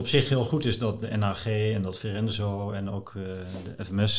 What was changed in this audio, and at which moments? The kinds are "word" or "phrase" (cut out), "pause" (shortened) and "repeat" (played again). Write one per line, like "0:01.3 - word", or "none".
none